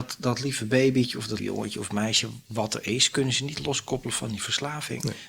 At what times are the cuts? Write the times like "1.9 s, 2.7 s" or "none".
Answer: 1.4 s